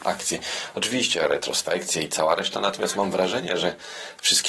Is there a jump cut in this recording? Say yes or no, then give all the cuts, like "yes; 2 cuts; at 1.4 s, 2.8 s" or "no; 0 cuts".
no; 0 cuts